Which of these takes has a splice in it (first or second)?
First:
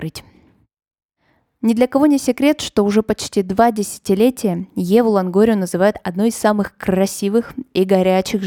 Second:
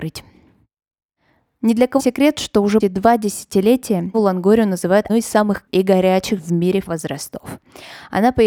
second